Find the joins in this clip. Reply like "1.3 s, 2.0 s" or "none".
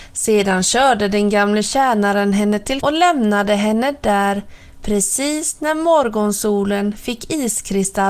2.8 s